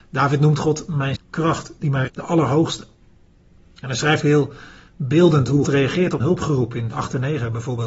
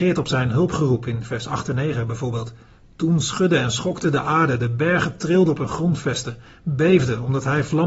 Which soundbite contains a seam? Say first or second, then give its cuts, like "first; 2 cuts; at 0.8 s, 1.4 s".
first; 6 cuts; at 1.2 s, 2.1 s, 4.2 s, 5.6 s, 6.2 s, 6.9 s